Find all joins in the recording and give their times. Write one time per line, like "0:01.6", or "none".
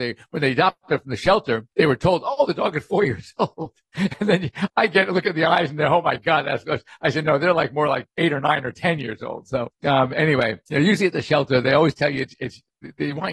0:01.7

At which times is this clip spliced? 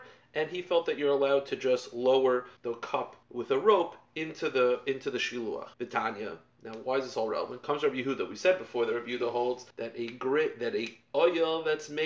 0:02.6
0:03.2
0:05.7
0:09.7

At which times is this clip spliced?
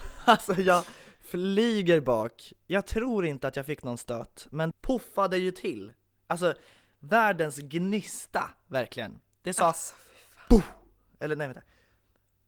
0:04.7

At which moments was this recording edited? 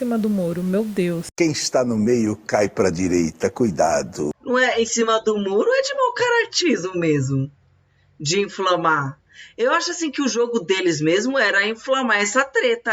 none

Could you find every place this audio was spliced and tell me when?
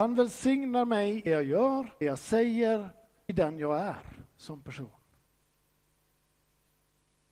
0:01.3
0:02.0
0:03.3

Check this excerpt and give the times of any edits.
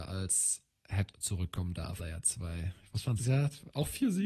0:01.1
0:02.0
0:03.2

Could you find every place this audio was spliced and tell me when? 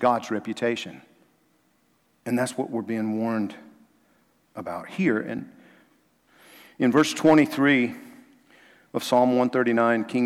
none

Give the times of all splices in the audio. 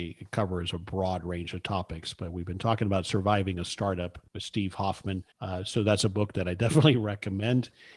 0:04.3
0:05.3

